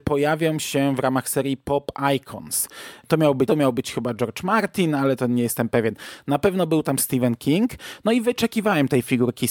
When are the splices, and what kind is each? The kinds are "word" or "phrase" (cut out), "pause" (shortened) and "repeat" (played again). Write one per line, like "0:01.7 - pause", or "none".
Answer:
0:03.5 - phrase